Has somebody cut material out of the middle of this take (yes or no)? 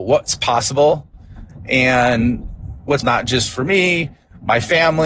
yes